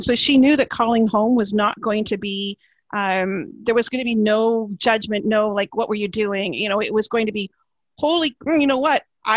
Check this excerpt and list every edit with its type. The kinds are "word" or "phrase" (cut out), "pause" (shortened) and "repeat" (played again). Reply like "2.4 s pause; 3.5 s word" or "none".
none